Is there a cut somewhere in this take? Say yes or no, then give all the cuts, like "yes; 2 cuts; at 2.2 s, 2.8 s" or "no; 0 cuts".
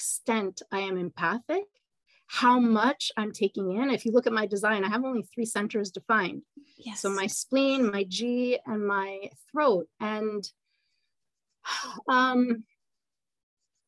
no; 0 cuts